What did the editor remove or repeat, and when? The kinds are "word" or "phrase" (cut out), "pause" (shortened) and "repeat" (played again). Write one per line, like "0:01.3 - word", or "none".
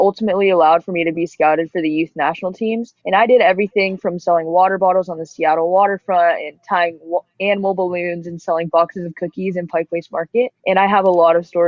0:03.0 - pause
0:10.6 - pause